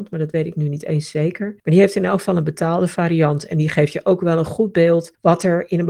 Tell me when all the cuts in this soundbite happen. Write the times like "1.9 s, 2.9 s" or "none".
none